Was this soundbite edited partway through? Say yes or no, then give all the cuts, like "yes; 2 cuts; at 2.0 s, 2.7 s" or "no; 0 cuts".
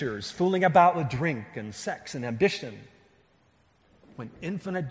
no; 0 cuts